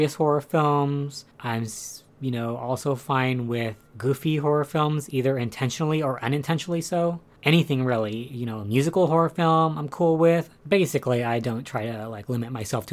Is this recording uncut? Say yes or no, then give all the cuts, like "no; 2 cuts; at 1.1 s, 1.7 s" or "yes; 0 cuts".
yes; 0 cuts